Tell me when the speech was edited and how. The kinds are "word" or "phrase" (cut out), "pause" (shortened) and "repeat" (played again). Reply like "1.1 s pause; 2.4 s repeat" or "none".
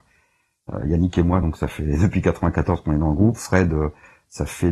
none